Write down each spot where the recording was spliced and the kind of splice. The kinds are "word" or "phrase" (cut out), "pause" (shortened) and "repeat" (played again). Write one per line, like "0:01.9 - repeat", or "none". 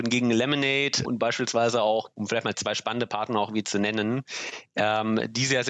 0:01.0 - word
0:02.1 - word
0:02.5 - word

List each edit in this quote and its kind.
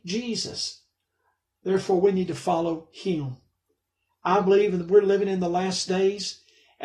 none

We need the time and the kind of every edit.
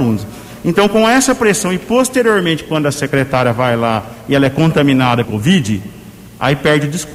0:05.2 - word

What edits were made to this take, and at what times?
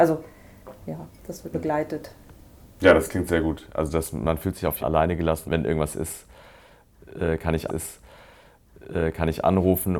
0:01.2 - pause
0:01.5 - word
0:04.8 - phrase
0:05.5 - phrase
0:07.7 - repeat

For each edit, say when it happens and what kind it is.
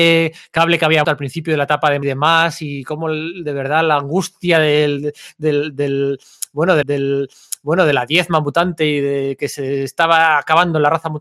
0:01.0 - word
0:02.0 - phrase
0:06.8 - repeat

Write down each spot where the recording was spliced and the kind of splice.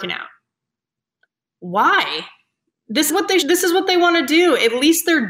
0:03.1 - word
0:03.4 - word

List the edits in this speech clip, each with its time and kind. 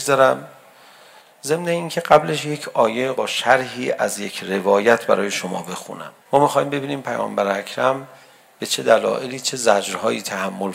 0:03.1 - word
0:06.2 - pause

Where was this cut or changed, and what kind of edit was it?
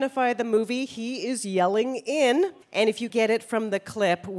0:02.6 - pause
0:03.1 - word

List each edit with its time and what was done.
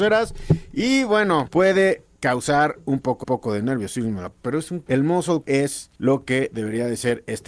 0:01.5 - word
0:03.2 - repeat
0:04.3 - word
0:04.9 - word
0:05.4 - word
0:06.0 - pause

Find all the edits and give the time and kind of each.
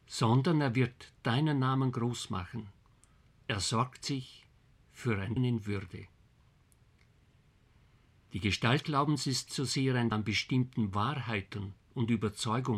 0:05.4 - word
0:08.8 - word
0:09.5 - word
0:10.1 - word

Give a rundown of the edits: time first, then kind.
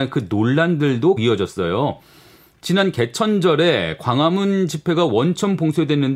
0:01.2 - word

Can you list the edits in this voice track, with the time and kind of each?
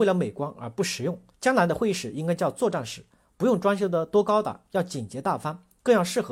0:01.3 - pause

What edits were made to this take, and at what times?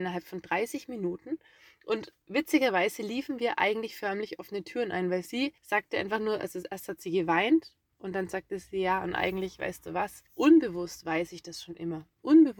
0:02.2 - pause
0:05.6 - pause
0:10.3 - pause

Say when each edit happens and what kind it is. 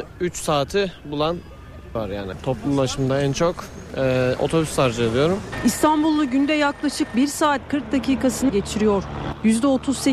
0:02.0 - word
0:08.5 - word

